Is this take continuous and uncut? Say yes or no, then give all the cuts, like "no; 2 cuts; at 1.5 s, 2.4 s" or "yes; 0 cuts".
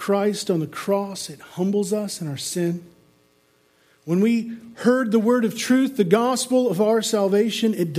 yes; 0 cuts